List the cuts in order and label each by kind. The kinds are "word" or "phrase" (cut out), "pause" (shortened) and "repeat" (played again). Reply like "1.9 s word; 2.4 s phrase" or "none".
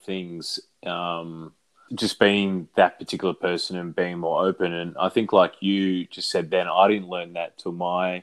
1.9 s word